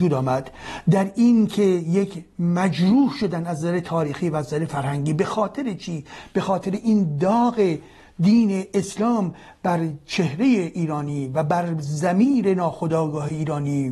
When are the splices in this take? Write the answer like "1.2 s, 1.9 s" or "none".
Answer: none